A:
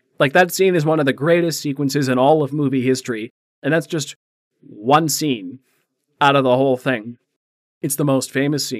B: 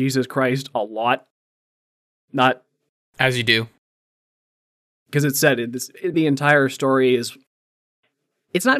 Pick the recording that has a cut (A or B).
B